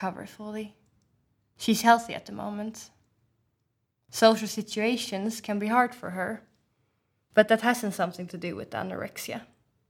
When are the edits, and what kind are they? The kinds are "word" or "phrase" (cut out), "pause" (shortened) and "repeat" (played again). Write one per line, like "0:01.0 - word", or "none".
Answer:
none